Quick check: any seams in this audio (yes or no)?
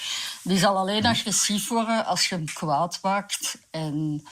no